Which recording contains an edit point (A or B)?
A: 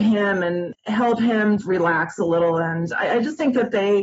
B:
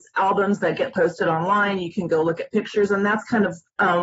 A